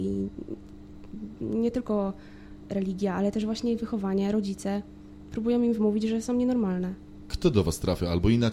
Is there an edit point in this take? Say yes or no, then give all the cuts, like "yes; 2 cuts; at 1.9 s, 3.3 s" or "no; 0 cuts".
no; 0 cuts